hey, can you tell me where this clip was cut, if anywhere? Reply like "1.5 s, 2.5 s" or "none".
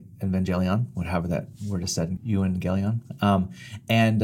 2.2 s